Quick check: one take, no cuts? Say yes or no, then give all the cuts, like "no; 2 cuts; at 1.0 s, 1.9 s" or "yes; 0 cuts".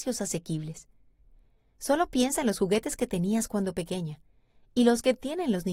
yes; 0 cuts